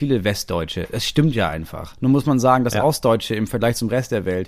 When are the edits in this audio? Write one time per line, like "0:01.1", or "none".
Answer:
none

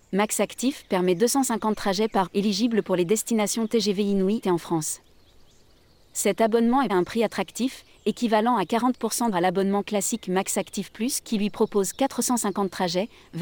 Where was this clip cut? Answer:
0:02.3
0:04.4
0:06.9
0:09.3

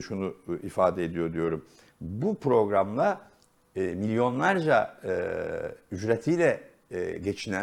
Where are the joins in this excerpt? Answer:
none

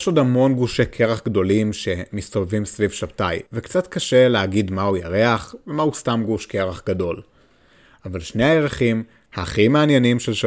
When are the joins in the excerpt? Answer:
0:03.5

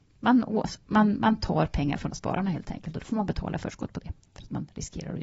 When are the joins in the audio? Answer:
0:02.1

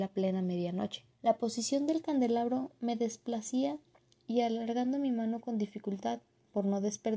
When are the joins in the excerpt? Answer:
0:01.1

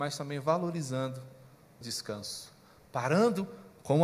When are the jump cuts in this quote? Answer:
0:01.8

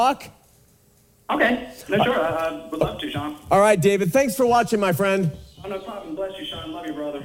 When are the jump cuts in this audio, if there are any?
0:05.5

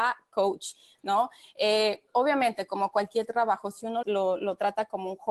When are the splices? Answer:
0:04.0

